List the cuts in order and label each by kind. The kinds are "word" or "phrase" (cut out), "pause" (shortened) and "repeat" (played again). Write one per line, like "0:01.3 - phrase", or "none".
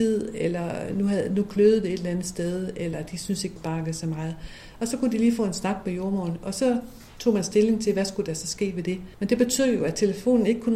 0:03.6 - word
0:09.1 - pause